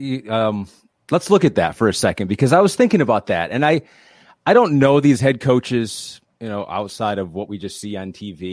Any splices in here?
no; 0 cuts

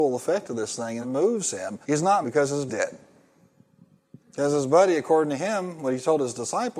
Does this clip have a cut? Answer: yes; 5 cuts; at 1.0 s, 1.8 s, 2.2 s, 2.7 s, 4.2 s

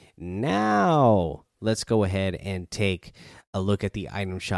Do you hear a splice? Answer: no; 0 cuts

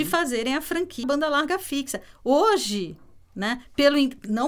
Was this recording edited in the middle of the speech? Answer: yes; 1 cut; at 1.0 s

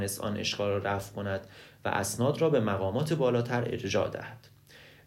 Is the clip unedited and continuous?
yes; 0 cuts

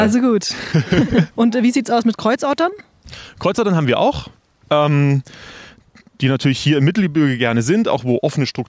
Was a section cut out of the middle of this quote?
no; 0 cuts

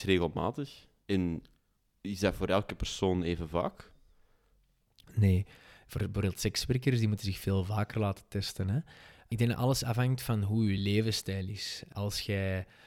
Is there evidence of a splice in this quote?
no; 0 cuts

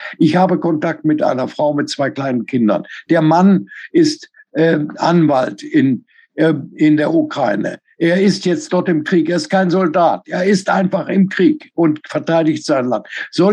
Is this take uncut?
yes; 0 cuts

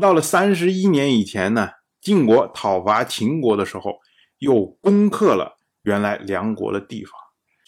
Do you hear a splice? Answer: no; 0 cuts

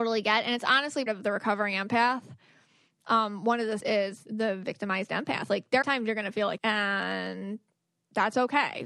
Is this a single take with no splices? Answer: no; 5 cuts; at 1.1 s, 3.8 s, 4.3 s, 5.8 s, 6.6 s

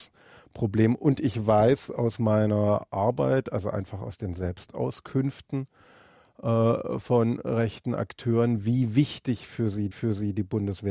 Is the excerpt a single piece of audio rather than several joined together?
no; 1 cut; at 9.9 s

